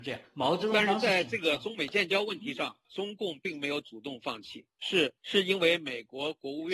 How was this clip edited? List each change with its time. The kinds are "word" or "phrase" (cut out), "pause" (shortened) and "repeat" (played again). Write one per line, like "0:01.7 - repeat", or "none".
0:05.2 - pause